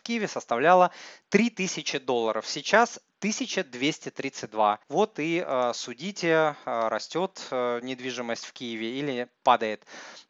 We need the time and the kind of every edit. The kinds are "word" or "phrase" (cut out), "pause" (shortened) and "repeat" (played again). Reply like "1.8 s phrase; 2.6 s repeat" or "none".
4.8 s pause

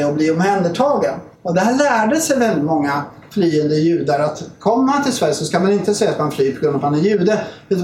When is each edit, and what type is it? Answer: 1.3 s pause

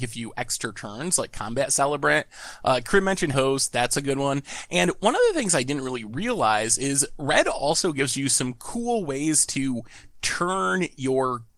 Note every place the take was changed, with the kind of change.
3.3 s phrase

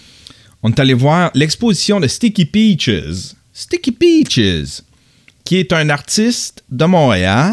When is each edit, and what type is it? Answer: none

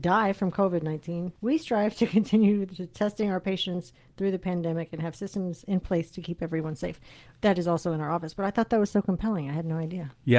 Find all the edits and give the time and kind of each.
none

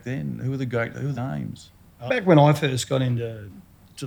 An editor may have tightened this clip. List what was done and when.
1.1 s word; 2.1 s word

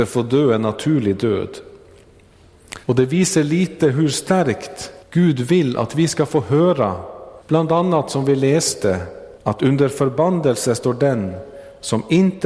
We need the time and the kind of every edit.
2.8 s pause; 5.0 s pause; 7.4 s pause; 9.4 s pause

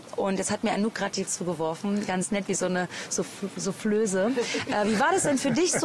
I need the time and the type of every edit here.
1.3 s word

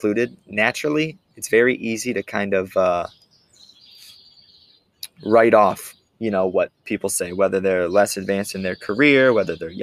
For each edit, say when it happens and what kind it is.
6.8 s pause

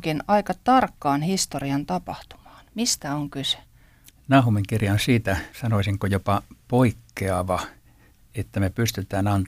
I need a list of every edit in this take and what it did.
4.1 s pause; 5.5 s pause; 6.6 s pause

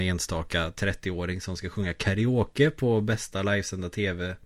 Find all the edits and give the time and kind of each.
none

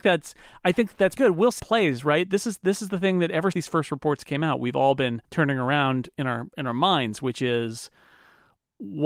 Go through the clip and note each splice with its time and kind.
1.2 s word; 1.6 s phrase; 3.5 s word; 5.2 s pause

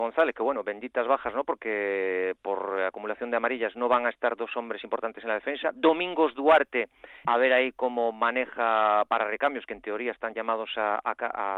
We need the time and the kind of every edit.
7.2 s phrase

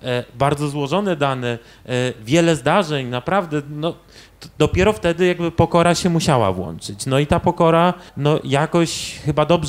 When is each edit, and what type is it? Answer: 8.1 s pause

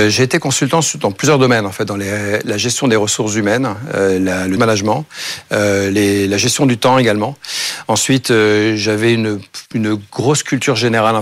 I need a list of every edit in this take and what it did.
4.6 s word; 9.7 s pause

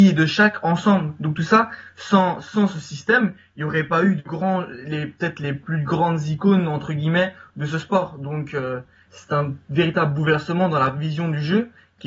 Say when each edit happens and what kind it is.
none

